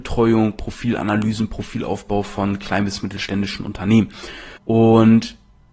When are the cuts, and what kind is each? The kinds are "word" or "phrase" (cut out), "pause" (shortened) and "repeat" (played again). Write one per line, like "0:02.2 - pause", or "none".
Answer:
0:04.6 - pause